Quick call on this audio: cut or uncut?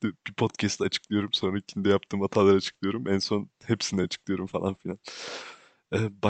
uncut